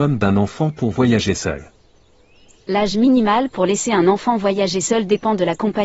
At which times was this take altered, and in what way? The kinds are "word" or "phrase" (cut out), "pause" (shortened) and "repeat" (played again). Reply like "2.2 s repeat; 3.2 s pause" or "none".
none

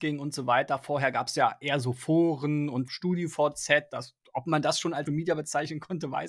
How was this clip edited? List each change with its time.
2.9 s phrase; 5.1 s word

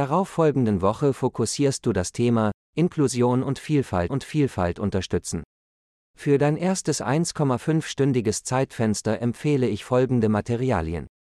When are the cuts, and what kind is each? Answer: 4.1 s repeat

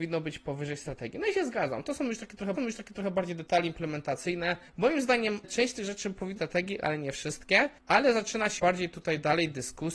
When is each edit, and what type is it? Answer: 2.5 s repeat; 4.7 s pause; 5.4 s word; 6.4 s phrase; 7.8 s pause; 8.6 s word

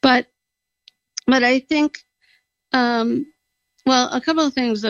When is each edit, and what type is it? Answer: none

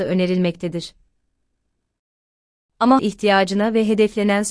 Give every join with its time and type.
3.0 s word

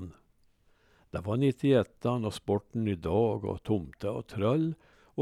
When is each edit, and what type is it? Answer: none

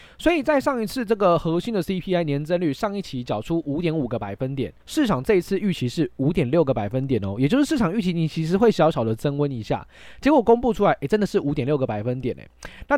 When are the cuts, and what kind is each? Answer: 4.8 s pause

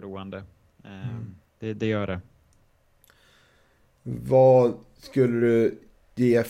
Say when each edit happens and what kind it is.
1.5 s pause

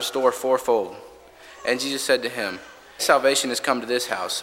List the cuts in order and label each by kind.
3.0 s word

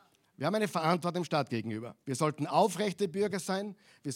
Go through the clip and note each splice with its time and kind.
2.0 s pause

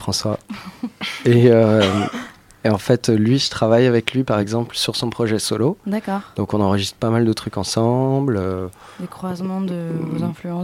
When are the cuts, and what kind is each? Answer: none

